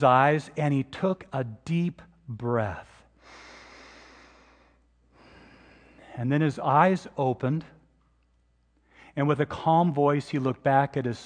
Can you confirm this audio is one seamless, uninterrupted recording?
yes; 0 cuts

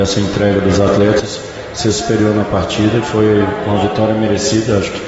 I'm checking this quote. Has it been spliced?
no; 0 cuts

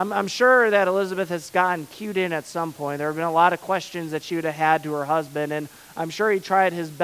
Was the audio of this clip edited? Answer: no; 0 cuts

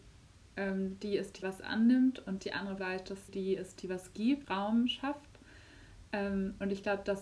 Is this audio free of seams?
no; 5 cuts; at 1.4 s, 2.4 s, 2.8 s, 3.3 s, 4.4 s

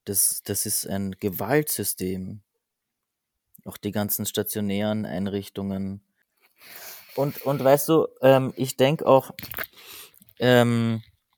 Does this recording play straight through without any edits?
yes; 0 cuts

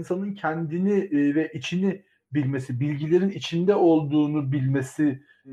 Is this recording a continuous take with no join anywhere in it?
yes; 0 cuts

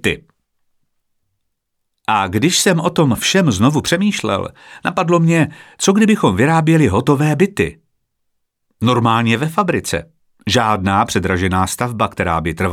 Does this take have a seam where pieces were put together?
no; 0 cuts

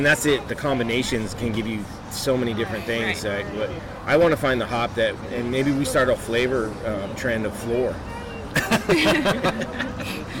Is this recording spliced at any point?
yes; 1 cut; at 6.2 s

